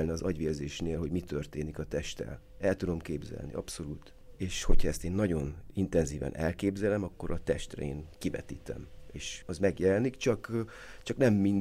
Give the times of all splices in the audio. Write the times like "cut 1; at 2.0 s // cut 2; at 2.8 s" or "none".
none

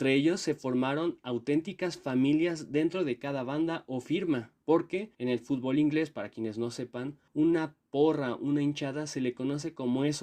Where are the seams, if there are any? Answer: cut 1; at 5.1 s // cut 2; at 7.3 s

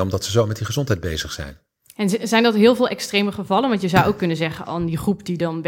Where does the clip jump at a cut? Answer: none

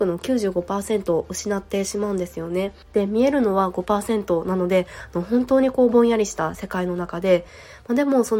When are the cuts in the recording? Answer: cut 1; at 2.8 s

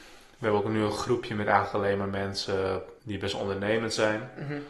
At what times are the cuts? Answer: cut 1; at 3.0 s

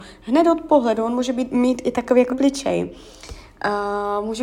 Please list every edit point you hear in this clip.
cut 1; at 2.3 s

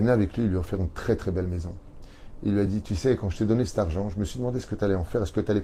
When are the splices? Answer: none

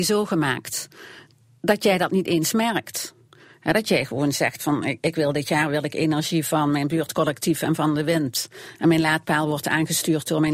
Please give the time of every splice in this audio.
none

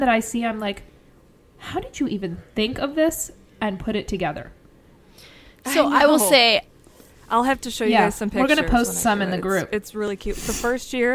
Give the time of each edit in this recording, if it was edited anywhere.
none

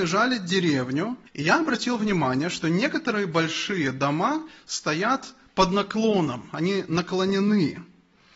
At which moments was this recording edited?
cut 1; at 1.3 s

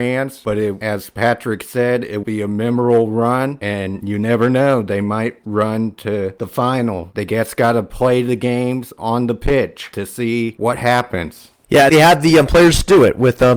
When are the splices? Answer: cut 1; at 2.2 s // cut 2; at 5.4 s

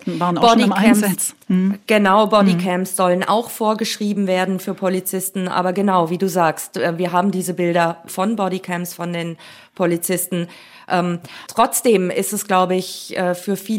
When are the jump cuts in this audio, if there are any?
cut 1; at 8.1 s // cut 2; at 11.5 s

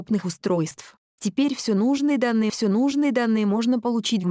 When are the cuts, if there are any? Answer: cut 1; at 2.5 s

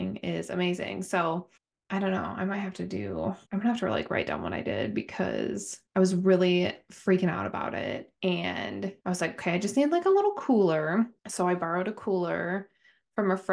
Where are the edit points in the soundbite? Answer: cut 1; at 1.6 s // cut 2; at 3.4 s // cut 3; at 5.9 s // cut 4; at 9.0 s // cut 5; at 11.2 s

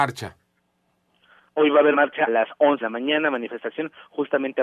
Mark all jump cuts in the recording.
cut 1; at 1.9 s // cut 2; at 2.3 s // cut 3; at 2.8 s

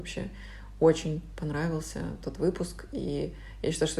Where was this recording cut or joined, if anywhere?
none

